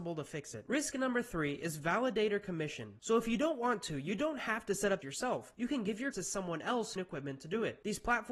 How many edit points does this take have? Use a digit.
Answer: 3